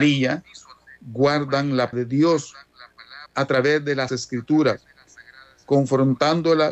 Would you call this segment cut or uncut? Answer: cut